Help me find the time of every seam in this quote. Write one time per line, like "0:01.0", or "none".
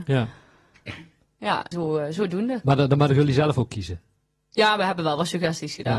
0:01.7